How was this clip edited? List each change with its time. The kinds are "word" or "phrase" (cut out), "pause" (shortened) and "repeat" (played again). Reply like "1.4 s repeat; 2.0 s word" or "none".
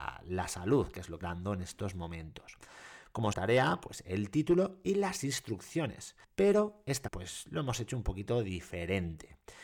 1.2 s word; 3.3 s phrase; 6.2 s pause; 7.1 s word